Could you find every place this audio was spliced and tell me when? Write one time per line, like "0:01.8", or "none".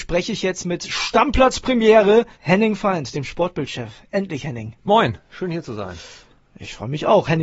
0:02.3